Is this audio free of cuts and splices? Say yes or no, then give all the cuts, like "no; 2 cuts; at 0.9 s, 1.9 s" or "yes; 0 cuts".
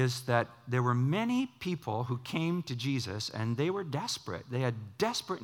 yes; 0 cuts